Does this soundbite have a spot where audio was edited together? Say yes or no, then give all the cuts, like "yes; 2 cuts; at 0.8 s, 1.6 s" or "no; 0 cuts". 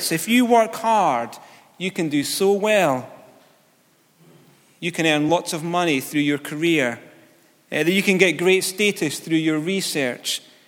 no; 0 cuts